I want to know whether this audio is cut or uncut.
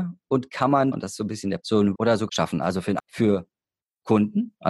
cut